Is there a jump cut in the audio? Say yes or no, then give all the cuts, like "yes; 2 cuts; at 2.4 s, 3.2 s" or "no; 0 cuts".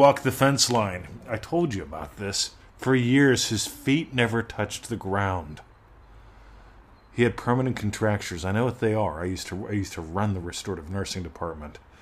no; 0 cuts